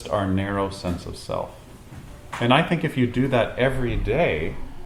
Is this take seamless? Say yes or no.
yes